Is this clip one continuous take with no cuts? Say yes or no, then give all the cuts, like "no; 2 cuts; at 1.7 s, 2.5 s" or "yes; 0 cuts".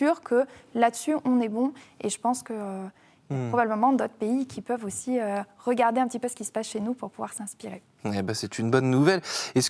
yes; 0 cuts